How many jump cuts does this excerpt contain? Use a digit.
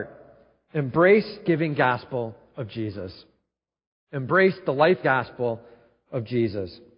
2